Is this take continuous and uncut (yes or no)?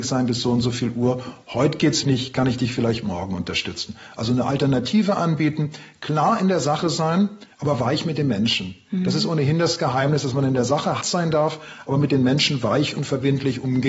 no